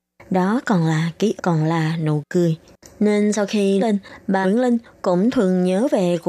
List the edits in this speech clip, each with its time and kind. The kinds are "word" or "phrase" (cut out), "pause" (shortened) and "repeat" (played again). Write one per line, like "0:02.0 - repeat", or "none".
0:01.4 - word
0:03.8 - word
0:04.4 - word